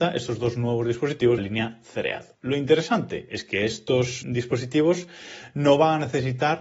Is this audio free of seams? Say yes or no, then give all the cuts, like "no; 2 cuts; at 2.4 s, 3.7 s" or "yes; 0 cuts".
no; 3 cuts; at 1.4 s, 2.3 s, 4.2 s